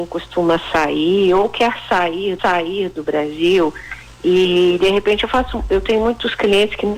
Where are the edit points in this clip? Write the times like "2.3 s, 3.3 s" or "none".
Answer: 2.4 s